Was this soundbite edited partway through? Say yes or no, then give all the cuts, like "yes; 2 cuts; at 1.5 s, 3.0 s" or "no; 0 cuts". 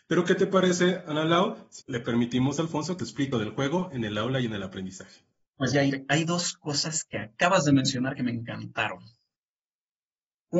yes; 4 cuts; at 1.8 s, 3.0 s, 3.3 s, 5.7 s